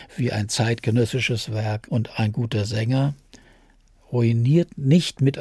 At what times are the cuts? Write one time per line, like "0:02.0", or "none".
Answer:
none